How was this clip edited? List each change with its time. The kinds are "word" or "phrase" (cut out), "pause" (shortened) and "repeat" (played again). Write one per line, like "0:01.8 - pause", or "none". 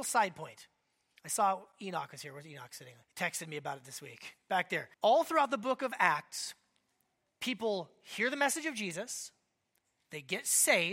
0:03.0 - pause
0:04.9 - pause